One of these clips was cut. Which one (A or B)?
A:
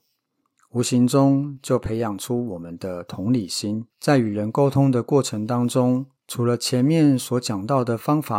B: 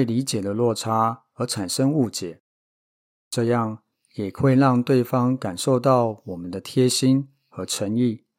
A